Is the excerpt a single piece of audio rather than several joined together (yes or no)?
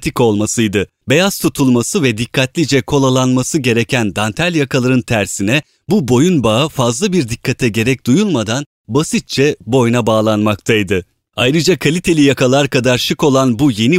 yes